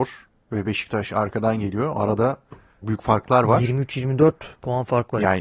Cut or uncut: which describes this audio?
cut